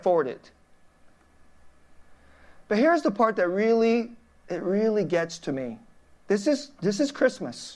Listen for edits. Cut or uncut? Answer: uncut